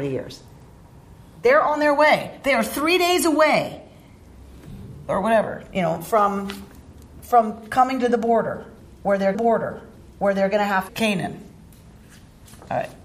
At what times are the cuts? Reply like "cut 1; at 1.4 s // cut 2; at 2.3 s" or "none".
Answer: cut 1; at 9.3 s // cut 2; at 10.9 s